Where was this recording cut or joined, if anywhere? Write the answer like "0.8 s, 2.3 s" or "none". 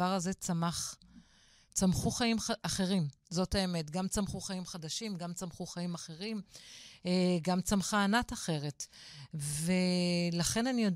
none